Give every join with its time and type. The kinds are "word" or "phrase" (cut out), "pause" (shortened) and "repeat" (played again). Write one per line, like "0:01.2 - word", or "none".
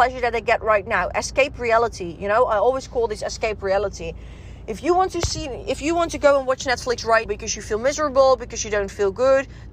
0:07.3 - word